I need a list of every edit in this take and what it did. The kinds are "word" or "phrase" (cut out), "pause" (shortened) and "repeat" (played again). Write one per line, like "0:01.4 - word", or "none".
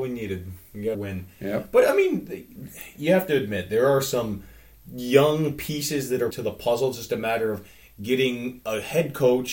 0:00.9 - word
0:06.3 - word